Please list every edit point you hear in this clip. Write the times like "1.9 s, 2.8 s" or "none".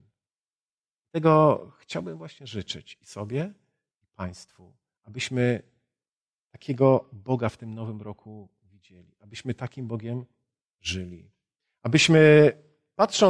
none